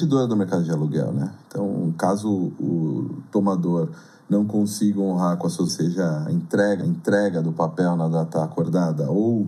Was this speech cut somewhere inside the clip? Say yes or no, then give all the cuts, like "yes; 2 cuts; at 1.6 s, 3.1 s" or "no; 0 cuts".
yes; 2 cuts; at 5.7 s, 6.8 s